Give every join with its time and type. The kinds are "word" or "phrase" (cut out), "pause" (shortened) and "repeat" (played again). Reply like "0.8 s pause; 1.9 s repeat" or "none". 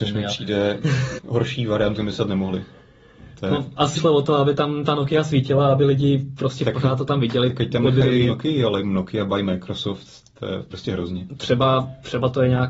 1.2 s word; 2.0 s word; 3.9 s word; 8.3 s word; 8.8 s word; 10.7 s word